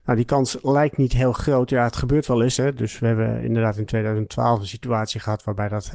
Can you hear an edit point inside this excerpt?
no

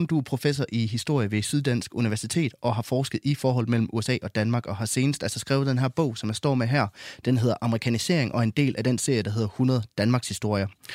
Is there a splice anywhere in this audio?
no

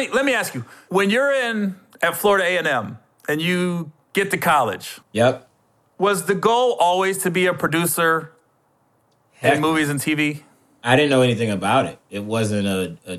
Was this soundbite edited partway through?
no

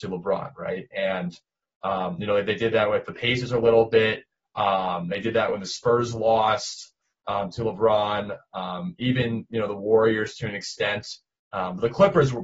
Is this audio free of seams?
yes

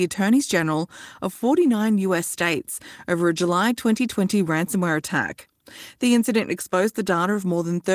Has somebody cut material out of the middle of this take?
no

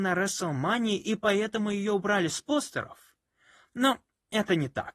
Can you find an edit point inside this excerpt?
no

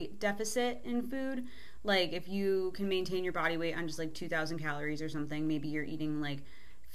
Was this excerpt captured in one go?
yes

